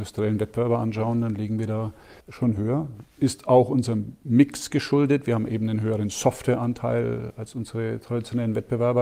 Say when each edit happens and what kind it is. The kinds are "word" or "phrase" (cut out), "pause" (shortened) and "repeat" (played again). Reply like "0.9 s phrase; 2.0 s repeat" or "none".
2.2 s pause